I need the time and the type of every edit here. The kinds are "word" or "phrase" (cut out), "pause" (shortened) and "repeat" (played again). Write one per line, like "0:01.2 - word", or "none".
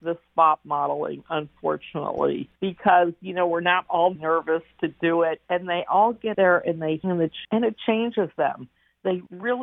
0:02.6 - pause
0:03.9 - phrase
0:04.2 - word
0:05.4 - pause
0:06.3 - word
0:07.0 - phrase
0:07.4 - word